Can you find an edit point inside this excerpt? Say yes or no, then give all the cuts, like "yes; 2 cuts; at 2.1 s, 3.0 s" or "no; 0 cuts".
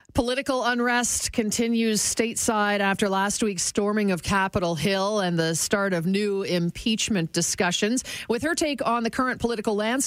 no; 0 cuts